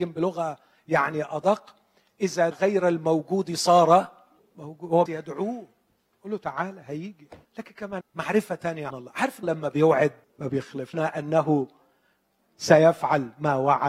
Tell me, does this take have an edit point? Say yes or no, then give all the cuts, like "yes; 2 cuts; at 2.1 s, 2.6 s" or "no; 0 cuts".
yes; 9 cuts; at 2.5 s, 4.4 s, 5.1 s, 7.5 s, 8.0 s, 8.9 s, 9.4 s, 10.2 s, 10.9 s